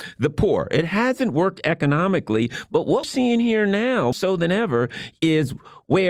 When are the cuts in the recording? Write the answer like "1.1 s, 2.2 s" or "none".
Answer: 3.0 s, 4.1 s